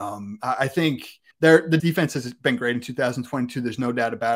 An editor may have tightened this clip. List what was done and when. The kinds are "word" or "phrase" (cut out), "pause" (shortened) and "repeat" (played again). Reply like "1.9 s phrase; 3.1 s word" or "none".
1.3 s pause; 1.8 s word